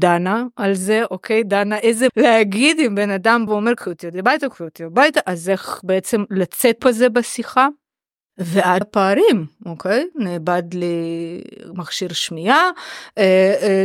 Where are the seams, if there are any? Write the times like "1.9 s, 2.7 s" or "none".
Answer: 2.1 s, 3.5 s, 6.8 s, 8.8 s